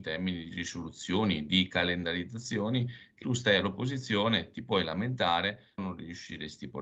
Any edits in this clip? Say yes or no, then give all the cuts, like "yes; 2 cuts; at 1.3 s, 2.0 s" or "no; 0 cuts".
yes; 2 cuts; at 3.2 s, 5.8 s